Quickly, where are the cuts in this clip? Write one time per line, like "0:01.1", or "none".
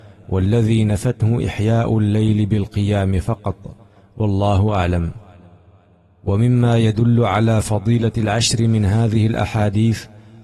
none